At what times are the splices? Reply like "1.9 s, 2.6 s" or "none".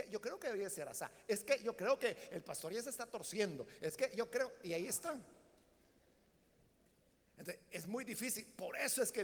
none